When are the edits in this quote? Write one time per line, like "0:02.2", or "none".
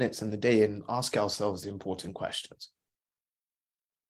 0:01.6